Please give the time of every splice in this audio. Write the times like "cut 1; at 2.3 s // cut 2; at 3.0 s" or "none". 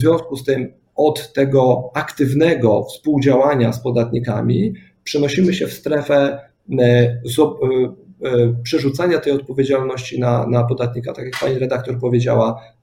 none